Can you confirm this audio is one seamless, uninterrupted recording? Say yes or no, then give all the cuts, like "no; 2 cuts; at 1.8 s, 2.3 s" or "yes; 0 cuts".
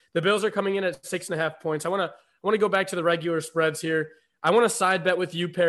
yes; 0 cuts